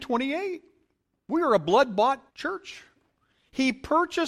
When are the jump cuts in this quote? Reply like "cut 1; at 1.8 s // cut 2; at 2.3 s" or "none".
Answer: cut 1; at 2.3 s